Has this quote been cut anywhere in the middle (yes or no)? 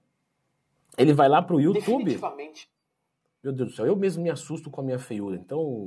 no